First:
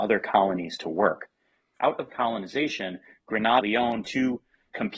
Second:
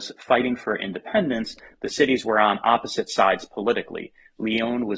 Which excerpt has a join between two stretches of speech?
first; 3 cuts; at 2.1 s, 3.6 s, 4.0 s

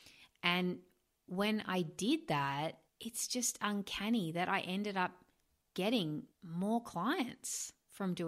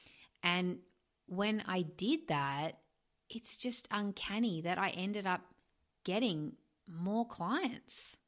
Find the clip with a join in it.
first; 2 cuts; at 2.9 s, 6.3 s

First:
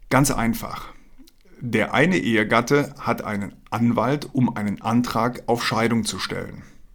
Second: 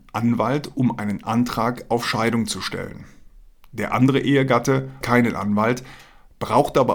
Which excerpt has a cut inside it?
second; 1 cut; at 5.0 s

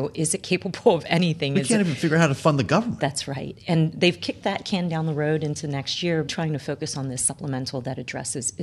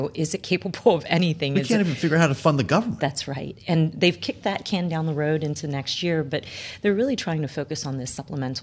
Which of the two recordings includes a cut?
first; 1 cut; at 6.3 s

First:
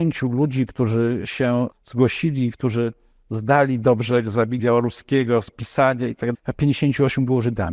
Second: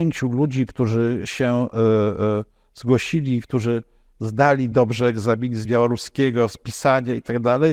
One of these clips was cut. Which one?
first; 3 cuts; at 1.7 s, 4.6 s, 6.3 s

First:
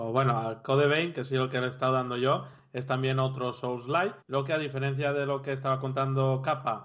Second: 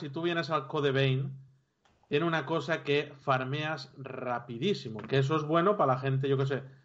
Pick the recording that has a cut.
first; 1 cut; at 4.2 s

